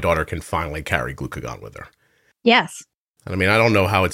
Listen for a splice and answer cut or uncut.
uncut